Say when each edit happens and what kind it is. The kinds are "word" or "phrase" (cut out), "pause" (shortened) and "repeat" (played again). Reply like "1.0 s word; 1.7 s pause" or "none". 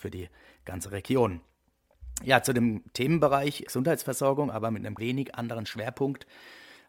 3.7 s word; 5.0 s word